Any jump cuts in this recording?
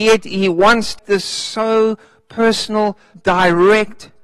yes; 2 cuts; at 1.0 s, 3.1 s

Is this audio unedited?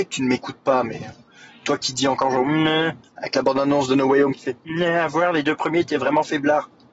yes; 0 cuts

